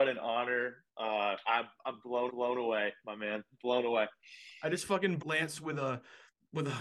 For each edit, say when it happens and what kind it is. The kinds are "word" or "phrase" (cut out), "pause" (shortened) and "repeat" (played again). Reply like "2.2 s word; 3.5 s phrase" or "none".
1.5 s word; 2.3 s repeat; 5.2 s word

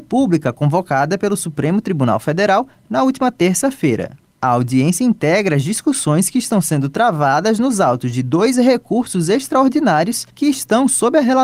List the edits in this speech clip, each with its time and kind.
10.3 s pause

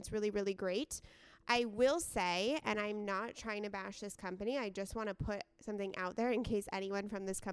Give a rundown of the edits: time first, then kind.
none

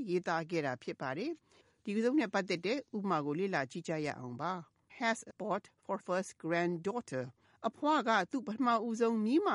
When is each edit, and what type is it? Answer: 4.9 s word; 5.3 s phrase; 6.0 s word; 7.4 s pause

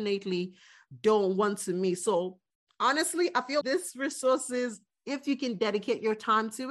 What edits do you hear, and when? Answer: 3.6 s word

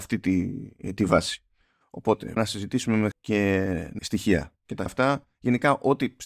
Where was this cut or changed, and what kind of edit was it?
2.4 s word; 3.1 s word; 4.0 s word; 4.9 s word

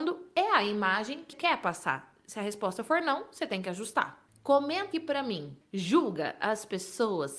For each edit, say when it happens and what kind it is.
1.3 s word; 4.9 s word; 5.6 s word

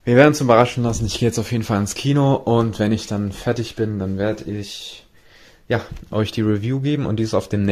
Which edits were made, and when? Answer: none

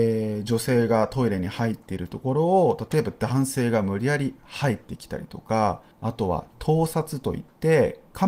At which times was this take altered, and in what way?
5.9 s pause

